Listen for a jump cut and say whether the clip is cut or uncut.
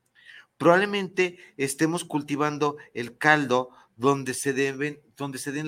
uncut